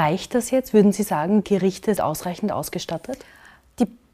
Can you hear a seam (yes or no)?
yes